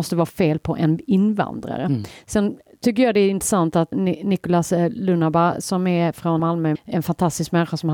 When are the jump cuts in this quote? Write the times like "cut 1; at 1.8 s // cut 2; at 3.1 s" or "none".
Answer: cut 1; at 3.9 s // cut 2; at 6.4 s // cut 3; at 6.8 s